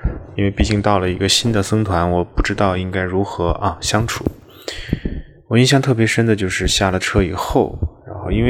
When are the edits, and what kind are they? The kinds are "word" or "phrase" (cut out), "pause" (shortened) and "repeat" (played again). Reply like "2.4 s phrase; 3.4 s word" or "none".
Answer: none